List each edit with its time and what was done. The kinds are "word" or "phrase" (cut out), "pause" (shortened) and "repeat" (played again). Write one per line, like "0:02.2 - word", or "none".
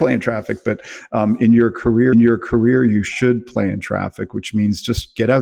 0:02.1 - repeat